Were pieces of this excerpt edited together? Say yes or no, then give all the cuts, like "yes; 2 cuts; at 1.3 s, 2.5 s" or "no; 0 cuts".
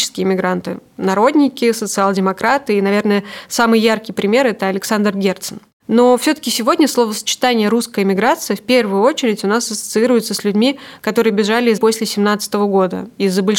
yes; 2 cuts; at 5.8 s, 11.8 s